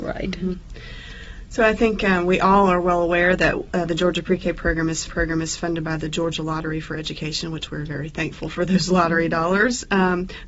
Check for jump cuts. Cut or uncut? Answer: cut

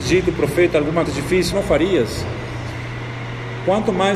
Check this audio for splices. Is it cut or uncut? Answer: cut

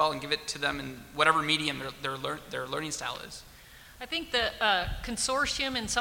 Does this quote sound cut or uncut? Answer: uncut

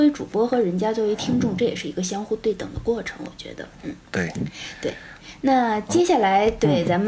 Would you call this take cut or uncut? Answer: cut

